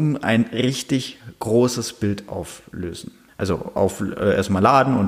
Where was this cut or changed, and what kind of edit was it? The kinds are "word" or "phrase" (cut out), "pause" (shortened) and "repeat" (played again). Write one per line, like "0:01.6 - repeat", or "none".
0:03.3 - pause